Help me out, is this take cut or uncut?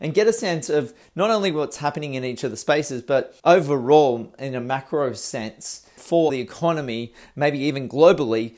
cut